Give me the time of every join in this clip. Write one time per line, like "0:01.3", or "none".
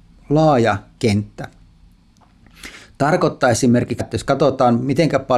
0:04.0